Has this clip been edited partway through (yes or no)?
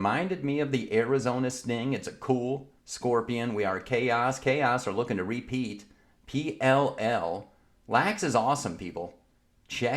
no